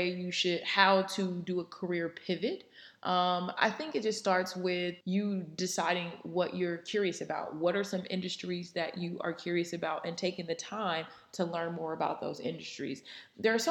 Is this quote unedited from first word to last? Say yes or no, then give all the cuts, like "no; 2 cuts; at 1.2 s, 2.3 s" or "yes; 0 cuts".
no; 1 cut; at 5.0 s